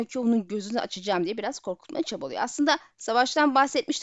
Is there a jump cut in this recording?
no; 0 cuts

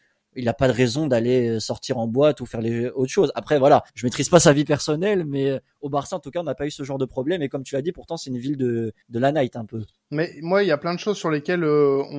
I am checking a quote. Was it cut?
yes; 2 cuts; at 3.9 s, 9.0 s

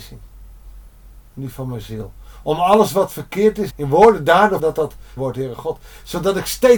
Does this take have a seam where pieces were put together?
yes; 3 cuts; at 3.7 s, 4.6 s, 5.2 s

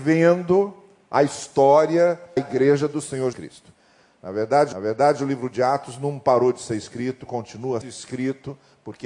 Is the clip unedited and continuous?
no; 4 cuts; at 2.4 s, 3.3 s, 4.7 s, 7.8 s

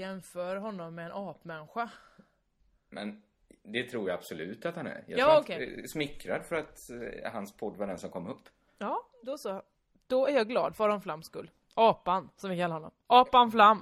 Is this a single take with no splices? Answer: yes; 0 cuts

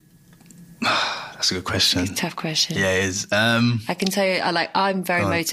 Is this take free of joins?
yes; 0 cuts

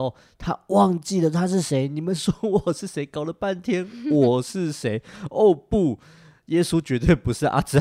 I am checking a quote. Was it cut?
no; 0 cuts

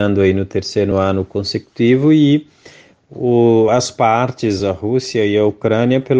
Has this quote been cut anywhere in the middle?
no; 0 cuts

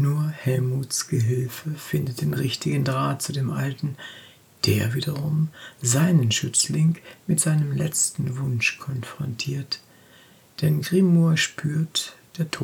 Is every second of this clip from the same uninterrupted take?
yes; 0 cuts

